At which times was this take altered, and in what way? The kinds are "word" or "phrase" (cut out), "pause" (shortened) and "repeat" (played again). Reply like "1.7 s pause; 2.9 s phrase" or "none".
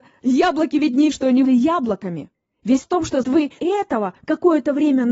1.1 s word; 1.5 s word; 2.8 s word; 3.2 s word; 3.6 s word